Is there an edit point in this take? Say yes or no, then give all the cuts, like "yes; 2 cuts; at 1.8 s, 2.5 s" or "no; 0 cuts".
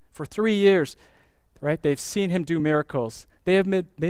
no; 0 cuts